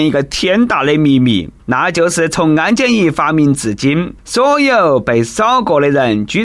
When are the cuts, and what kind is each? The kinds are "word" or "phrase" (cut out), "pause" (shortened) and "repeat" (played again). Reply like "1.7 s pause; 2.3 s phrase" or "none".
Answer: 1.6 s pause; 4.2 s pause